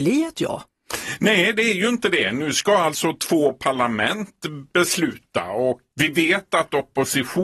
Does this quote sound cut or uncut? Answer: uncut